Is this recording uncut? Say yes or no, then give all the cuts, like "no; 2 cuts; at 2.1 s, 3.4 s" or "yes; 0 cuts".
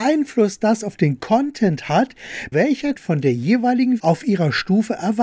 no; 3 cuts; at 2.5 s, 3.0 s, 4.0 s